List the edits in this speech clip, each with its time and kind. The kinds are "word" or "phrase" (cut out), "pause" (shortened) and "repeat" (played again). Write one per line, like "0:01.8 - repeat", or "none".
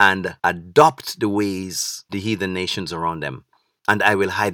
0:02.1 - word